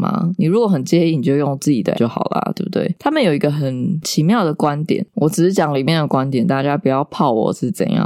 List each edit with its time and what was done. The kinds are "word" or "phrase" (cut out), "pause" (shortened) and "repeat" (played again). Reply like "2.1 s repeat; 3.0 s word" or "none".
1.9 s word